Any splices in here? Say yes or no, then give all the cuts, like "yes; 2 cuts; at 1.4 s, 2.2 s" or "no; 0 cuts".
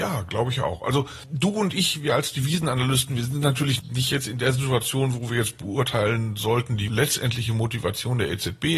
no; 0 cuts